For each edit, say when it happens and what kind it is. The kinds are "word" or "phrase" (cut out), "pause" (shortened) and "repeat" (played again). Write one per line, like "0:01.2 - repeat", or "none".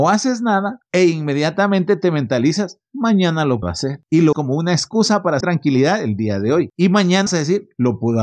0:03.6 - word
0:04.3 - word
0:05.4 - word
0:07.3 - word